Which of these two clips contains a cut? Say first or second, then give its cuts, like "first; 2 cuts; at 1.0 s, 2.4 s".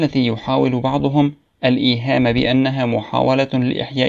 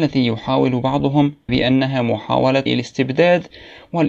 second; 2 cuts; at 1.5 s, 2.7 s